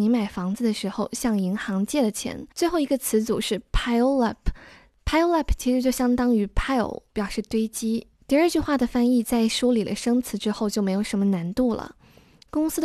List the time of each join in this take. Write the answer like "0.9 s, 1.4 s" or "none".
2.5 s, 8.2 s